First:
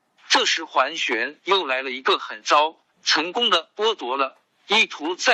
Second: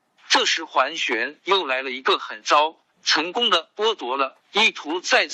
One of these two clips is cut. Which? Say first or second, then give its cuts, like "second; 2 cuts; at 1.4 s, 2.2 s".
second; 1 cut; at 4.4 s